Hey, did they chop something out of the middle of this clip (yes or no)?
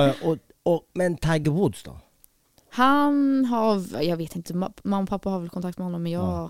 no